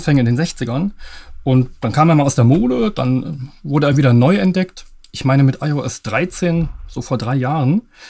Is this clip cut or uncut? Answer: uncut